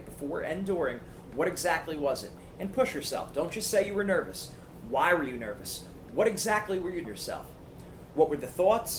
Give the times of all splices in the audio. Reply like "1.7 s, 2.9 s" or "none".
7.0 s